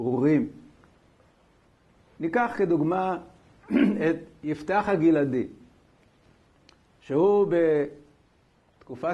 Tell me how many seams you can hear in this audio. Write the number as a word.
zero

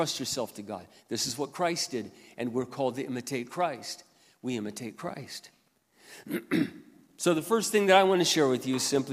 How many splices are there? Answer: zero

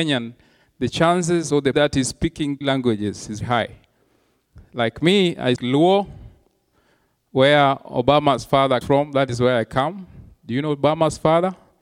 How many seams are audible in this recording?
five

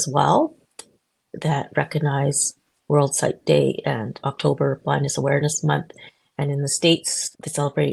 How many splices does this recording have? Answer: zero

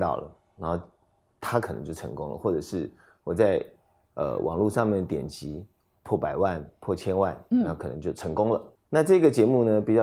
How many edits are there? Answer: one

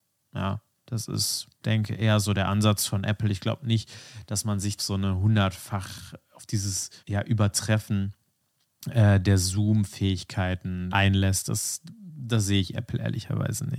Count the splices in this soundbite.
four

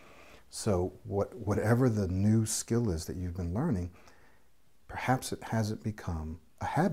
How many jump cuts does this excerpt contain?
zero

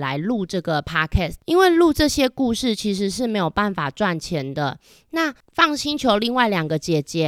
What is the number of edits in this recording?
one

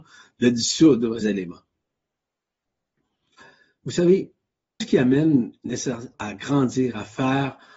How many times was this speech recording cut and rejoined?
three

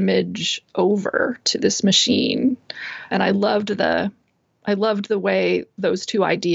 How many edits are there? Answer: one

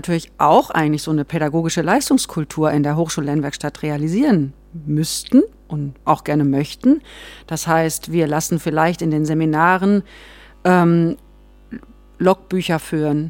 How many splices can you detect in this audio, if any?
one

